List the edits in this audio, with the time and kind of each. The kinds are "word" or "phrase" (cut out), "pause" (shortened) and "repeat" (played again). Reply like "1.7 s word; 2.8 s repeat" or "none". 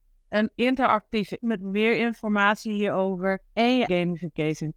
1.4 s word; 3.5 s pause; 3.9 s word